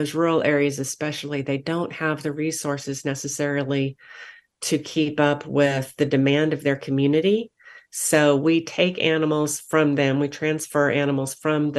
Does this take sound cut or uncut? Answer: uncut